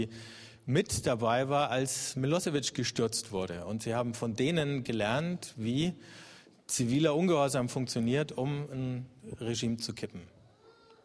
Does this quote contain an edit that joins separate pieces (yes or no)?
no